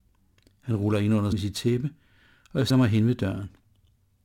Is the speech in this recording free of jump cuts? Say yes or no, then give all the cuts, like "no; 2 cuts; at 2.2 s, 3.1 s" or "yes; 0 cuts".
no; 2 cuts; at 1.3 s, 2.7 s